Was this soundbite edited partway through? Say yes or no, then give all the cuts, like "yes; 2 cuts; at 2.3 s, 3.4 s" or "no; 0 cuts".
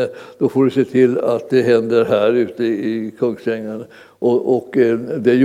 no; 0 cuts